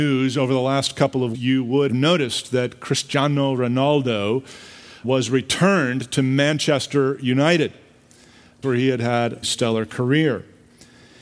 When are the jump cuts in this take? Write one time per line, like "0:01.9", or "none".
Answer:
0:01.3
0:01.9
0:05.0
0:08.6
0:09.4